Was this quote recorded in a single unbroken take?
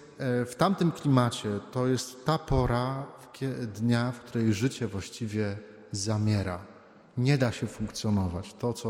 yes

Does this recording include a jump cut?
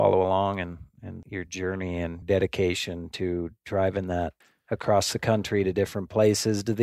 yes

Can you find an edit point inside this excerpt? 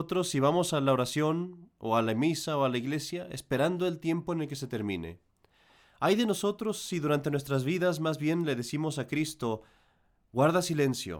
no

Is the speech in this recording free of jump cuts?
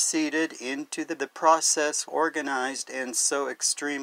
no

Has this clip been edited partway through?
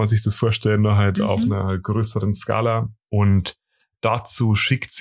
yes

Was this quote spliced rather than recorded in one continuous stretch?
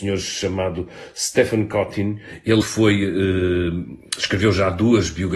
yes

